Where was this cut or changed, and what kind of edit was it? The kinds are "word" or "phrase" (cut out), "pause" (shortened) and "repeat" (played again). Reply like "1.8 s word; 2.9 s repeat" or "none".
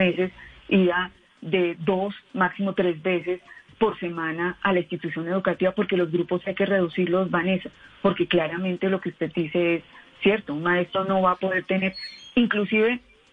none